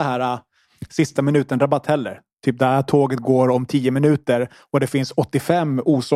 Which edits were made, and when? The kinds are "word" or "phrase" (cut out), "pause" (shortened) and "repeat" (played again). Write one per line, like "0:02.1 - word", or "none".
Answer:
none